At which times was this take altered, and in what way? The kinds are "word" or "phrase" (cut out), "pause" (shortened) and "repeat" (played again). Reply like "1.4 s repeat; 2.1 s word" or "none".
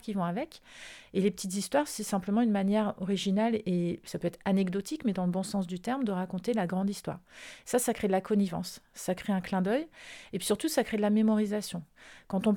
none